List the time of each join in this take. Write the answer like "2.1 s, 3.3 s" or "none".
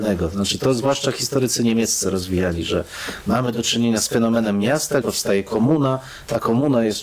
5.0 s